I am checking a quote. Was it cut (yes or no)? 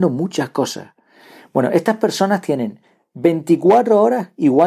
no